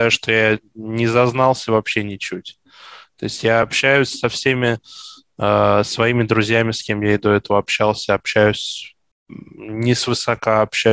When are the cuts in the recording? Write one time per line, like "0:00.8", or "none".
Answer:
none